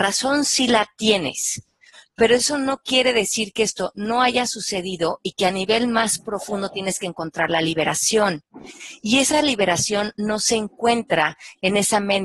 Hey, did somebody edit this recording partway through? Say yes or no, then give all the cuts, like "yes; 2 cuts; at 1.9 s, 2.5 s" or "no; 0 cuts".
no; 0 cuts